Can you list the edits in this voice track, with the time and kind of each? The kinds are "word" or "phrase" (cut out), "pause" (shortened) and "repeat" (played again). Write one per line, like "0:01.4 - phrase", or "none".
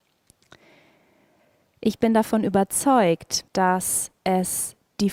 0:03.5 - pause